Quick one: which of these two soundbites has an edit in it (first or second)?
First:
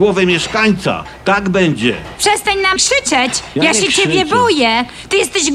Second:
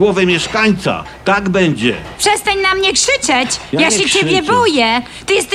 first